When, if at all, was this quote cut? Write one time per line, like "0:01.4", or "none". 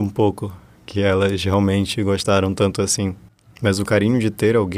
none

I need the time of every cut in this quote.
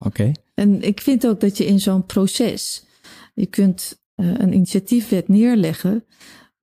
0:04.0

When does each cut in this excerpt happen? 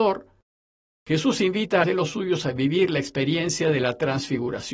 0:01.8

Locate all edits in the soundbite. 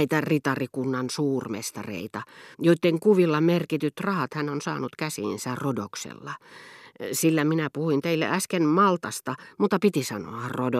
0:02.5

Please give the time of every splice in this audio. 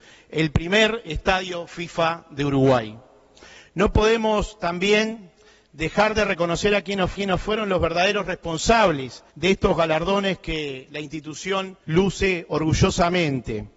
0:07.1
0:09.3
0:11.8

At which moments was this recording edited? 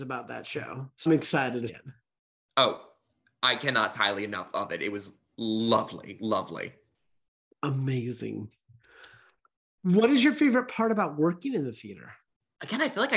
0:01.1
0:01.7
0:03.9

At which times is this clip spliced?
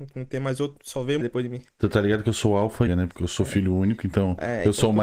0:01.2
0:02.9

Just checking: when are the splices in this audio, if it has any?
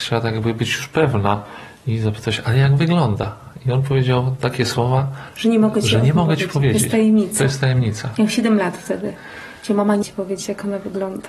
0:10.0

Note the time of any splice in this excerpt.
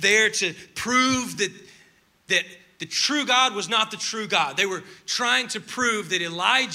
none

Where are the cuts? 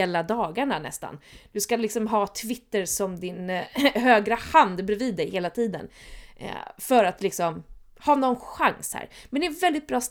none

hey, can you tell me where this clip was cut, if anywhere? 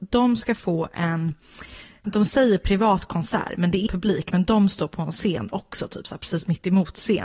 0:02.0
0:03.9

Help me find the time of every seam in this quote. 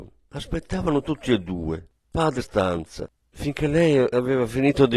0:02.4

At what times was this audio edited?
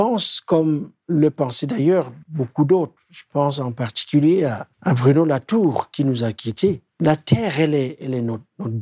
0:02.2
0:04.7
0:06.9

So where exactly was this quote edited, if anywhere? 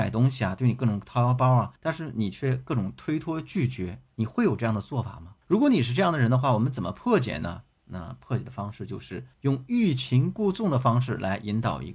0:01.8
0:04.1
0:05.4
0:09.3

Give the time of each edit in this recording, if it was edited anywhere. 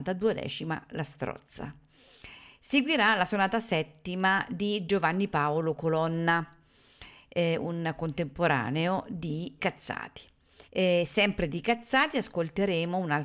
0:09.6
0:10.6

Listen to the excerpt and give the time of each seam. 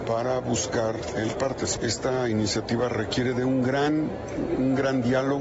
0:01.3

